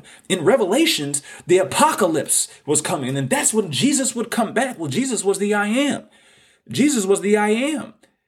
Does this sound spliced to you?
no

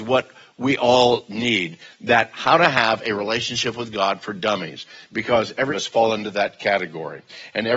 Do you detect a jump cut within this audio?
yes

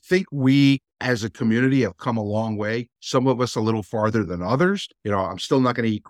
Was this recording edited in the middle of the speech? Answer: yes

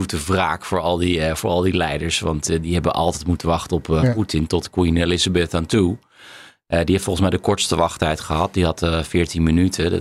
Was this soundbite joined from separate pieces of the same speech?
no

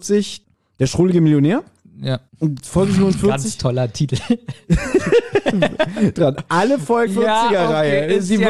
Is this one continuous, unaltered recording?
no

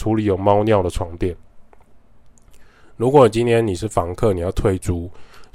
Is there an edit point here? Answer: no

